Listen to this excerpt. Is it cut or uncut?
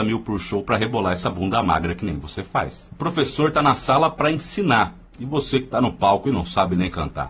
uncut